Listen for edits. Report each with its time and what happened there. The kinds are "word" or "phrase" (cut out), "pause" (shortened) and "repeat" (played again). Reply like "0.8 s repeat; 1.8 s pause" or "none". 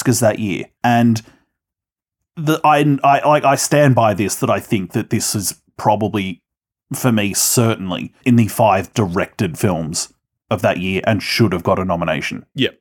8.2 s pause; 8.9 s word; 10.2 s pause